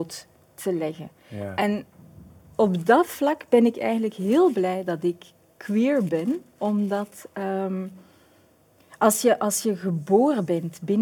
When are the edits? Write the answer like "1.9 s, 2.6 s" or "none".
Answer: none